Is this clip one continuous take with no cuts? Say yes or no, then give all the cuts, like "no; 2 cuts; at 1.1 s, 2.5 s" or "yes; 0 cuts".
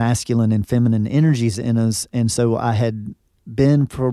yes; 0 cuts